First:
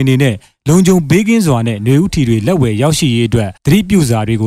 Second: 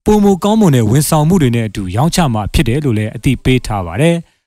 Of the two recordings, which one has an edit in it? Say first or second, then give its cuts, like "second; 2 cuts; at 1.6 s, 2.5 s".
first; 1 cut; at 3.6 s